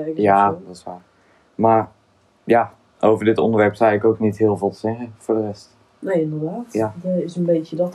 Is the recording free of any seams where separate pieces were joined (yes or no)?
yes